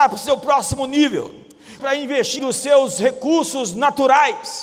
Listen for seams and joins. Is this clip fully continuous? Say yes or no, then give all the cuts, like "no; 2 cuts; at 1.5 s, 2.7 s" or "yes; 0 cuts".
no; 2 cuts; at 1.8 s, 2.4 s